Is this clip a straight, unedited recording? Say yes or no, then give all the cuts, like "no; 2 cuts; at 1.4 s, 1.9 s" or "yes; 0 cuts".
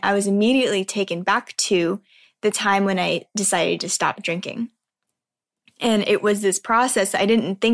yes; 0 cuts